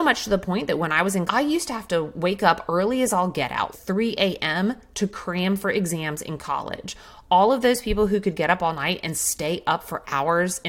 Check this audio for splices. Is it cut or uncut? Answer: cut